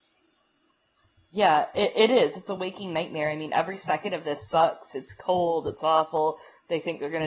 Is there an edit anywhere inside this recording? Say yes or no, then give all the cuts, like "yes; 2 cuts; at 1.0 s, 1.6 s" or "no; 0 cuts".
no; 0 cuts